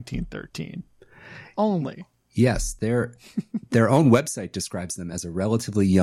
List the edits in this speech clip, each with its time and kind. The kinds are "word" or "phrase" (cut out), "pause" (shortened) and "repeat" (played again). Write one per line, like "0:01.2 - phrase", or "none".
none